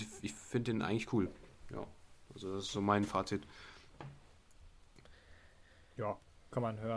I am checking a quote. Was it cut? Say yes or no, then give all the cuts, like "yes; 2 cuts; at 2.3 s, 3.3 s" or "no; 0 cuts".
no; 0 cuts